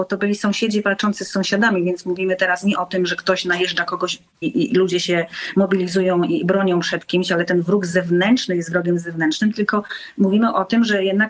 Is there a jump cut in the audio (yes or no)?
yes